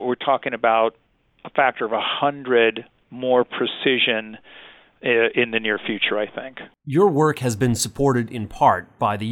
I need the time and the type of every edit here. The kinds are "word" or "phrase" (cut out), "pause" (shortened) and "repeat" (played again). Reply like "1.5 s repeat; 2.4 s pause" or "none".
none